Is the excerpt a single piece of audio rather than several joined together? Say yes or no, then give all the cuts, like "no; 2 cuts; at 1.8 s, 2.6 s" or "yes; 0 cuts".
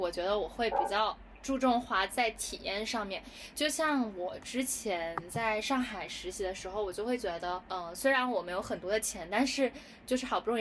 yes; 0 cuts